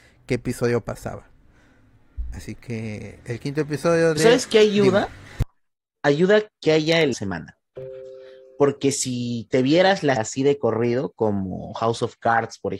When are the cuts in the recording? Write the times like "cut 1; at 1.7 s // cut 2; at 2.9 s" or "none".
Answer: cut 1; at 7.1 s // cut 2; at 10.2 s